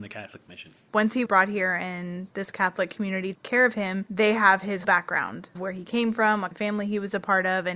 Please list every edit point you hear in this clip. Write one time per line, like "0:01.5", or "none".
0:01.3
0:03.3
0:04.8
0:05.5
0:06.5